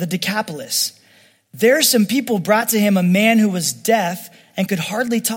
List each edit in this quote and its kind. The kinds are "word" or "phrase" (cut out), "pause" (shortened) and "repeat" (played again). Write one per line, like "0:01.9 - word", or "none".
none